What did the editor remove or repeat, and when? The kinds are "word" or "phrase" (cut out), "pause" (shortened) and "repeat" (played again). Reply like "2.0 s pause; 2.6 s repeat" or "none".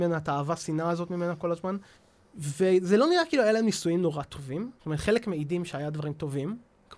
1.9 s pause; 4.8 s pause